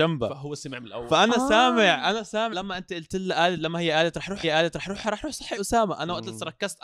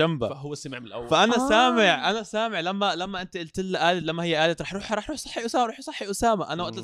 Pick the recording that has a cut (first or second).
first